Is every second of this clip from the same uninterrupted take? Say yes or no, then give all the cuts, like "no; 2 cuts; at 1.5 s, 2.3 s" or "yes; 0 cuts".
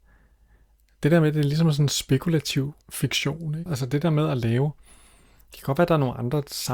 no; 1 cut; at 2.8 s